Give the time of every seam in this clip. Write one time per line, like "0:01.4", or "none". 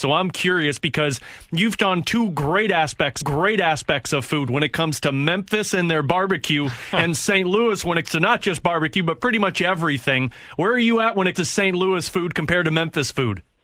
0:01.8
0:03.2
0:08.0
0:11.3